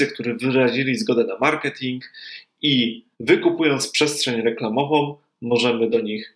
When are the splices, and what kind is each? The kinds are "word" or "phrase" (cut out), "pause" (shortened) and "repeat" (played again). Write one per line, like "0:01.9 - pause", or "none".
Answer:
0:03.1 - pause